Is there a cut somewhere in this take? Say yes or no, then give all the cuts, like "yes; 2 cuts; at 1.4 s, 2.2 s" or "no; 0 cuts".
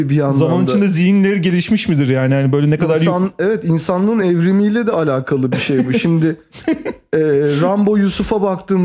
no; 0 cuts